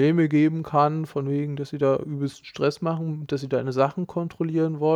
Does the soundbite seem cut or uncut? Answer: uncut